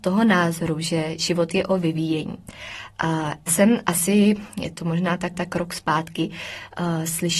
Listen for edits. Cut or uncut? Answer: cut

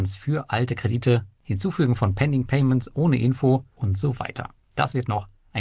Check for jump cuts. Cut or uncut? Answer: uncut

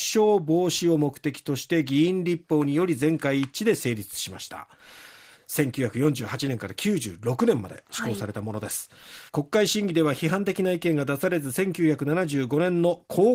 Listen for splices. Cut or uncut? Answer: cut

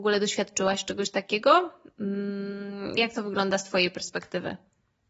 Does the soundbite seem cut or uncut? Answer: cut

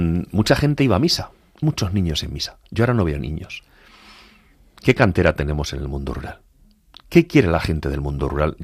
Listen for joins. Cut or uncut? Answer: cut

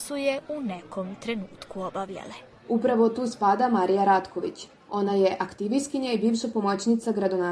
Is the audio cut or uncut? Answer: uncut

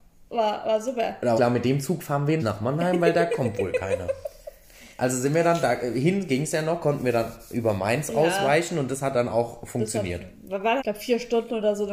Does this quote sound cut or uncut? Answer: cut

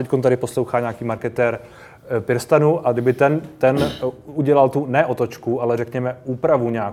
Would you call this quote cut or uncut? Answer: uncut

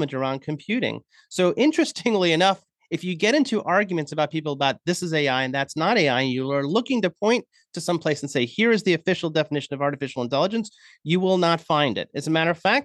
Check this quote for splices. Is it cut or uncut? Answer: uncut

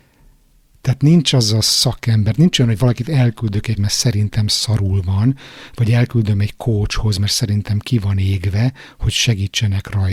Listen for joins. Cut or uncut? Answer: cut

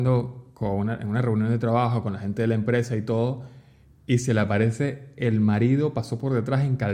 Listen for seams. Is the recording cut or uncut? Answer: uncut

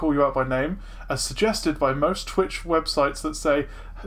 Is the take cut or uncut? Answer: uncut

